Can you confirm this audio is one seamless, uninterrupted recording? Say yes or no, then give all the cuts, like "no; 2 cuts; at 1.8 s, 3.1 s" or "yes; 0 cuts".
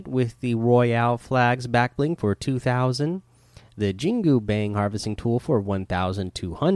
yes; 0 cuts